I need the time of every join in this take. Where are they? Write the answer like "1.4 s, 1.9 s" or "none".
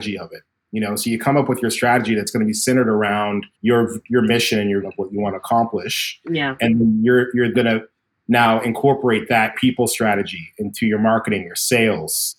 3.5 s, 4.8 s, 7.5 s, 9.5 s